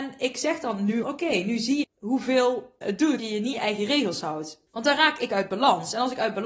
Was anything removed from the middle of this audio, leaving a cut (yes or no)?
yes